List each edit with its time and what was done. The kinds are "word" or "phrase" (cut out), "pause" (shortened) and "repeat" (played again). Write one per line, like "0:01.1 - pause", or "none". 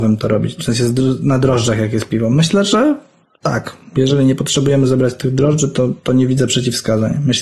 none